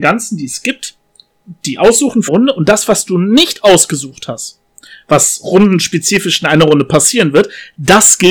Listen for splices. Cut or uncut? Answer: cut